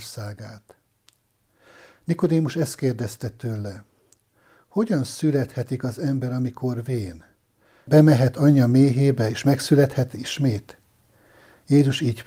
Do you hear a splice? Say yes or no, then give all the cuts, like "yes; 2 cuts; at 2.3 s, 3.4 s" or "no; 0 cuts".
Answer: no; 0 cuts